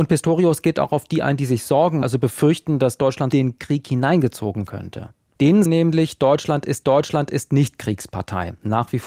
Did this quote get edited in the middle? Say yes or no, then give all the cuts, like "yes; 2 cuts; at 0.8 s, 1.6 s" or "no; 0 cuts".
yes; 5 cuts; at 2.0 s, 3.3 s, 4.7 s, 5.7 s, 6.8 s